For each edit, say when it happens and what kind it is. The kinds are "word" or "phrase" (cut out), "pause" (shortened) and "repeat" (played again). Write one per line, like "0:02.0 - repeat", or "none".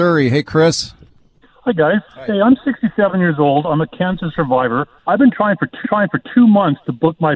0:02.1 - pause
0:05.0 - pause
0:05.8 - repeat